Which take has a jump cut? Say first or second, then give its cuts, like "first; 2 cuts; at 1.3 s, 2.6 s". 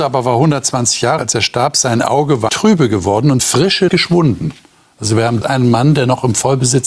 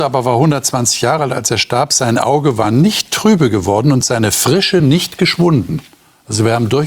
first; 5 cuts; at 1.2 s, 2.5 s, 3.4 s, 3.9 s, 5.4 s